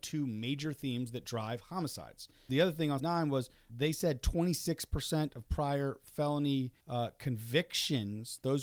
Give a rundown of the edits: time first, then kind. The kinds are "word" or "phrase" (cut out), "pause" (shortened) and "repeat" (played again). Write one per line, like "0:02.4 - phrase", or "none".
0:02.5 - word
0:03.0 - word
0:03.7 - word
0:06.8 - pause